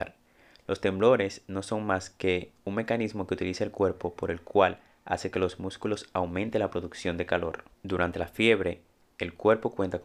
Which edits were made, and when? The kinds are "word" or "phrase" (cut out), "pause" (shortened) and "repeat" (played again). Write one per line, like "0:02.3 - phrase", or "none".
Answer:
0:07.7 - pause